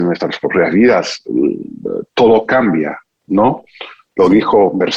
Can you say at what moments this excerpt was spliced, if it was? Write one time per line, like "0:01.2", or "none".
none